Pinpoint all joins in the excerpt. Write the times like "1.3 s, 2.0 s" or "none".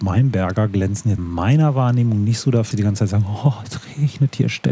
1.2 s, 2.7 s